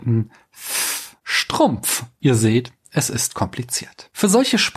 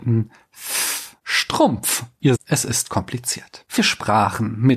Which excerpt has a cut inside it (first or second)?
second